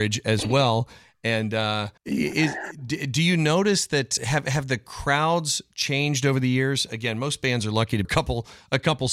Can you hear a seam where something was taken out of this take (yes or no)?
yes